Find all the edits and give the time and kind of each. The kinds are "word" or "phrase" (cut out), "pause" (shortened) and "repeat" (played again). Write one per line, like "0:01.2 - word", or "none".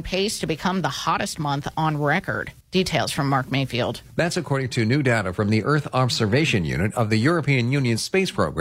0:02.6 - pause